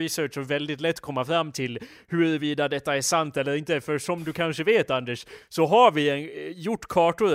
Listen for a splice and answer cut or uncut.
uncut